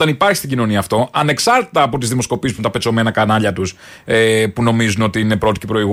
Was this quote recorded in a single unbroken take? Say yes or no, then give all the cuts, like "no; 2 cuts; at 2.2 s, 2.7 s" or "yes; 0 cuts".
no; 1 cut; at 2.6 s